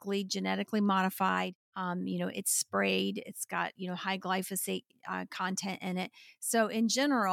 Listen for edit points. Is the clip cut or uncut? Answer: uncut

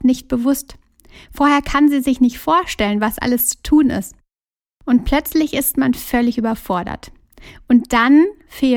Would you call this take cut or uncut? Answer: uncut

